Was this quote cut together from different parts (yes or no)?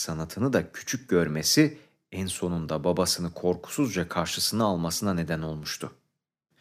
no